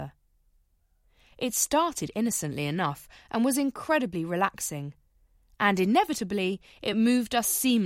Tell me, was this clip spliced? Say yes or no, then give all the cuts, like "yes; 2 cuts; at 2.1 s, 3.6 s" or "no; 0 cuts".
no; 0 cuts